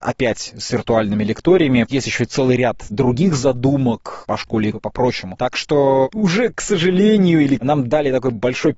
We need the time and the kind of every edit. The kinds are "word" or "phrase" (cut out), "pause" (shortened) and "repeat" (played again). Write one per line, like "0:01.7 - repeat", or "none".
0:01.9 - word
0:04.7 - word
0:06.1 - word
0:07.6 - word